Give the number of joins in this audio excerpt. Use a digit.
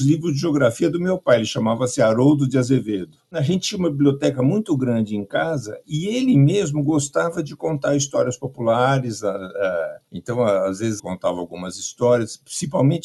2